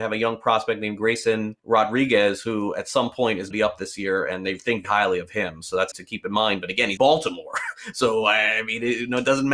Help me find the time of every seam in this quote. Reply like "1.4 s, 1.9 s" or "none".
1.6 s, 3.5 s, 4.8 s, 5.9 s, 7.0 s, 7.9 s